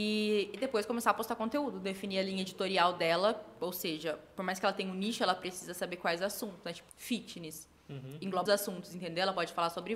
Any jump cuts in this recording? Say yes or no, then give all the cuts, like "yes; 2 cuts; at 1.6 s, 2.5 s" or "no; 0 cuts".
yes; 2 cuts; at 6.9 s, 8.5 s